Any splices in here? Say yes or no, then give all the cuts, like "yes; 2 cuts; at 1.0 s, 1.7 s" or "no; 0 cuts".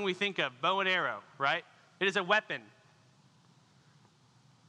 no; 0 cuts